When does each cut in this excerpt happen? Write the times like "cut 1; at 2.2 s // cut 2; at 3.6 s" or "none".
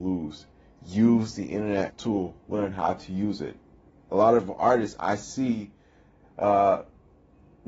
cut 1; at 1.9 s